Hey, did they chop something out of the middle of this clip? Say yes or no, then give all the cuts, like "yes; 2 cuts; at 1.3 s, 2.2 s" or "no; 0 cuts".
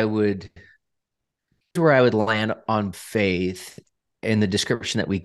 yes; 2 cuts; at 1.8 s, 2.9 s